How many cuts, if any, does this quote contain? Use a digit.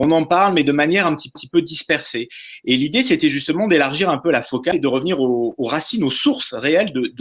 1